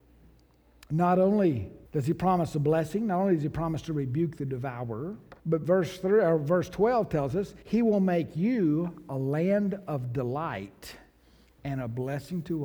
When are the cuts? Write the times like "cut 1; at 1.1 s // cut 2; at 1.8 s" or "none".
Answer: cut 1; at 1.9 s // cut 2; at 5.4 s // cut 3; at 7.6 s